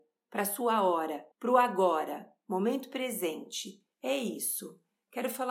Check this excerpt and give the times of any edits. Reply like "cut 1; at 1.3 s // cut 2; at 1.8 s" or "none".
cut 1; at 1.3 s // cut 2; at 3.9 s